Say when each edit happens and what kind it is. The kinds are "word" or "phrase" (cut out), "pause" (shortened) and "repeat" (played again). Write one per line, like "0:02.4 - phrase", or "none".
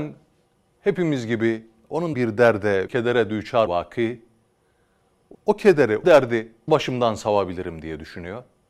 0:02.1 - word
0:02.9 - word
0:03.7 - word
0:05.3 - word
0:06.0 - word
0:06.7 - word

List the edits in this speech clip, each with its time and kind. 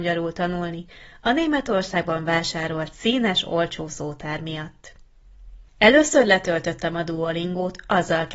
0:05.7 - pause

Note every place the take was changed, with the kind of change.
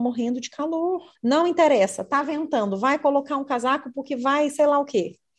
0:01.1 - pause

